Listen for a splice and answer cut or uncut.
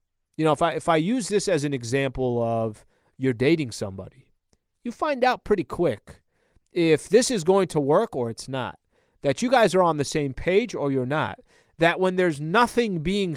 uncut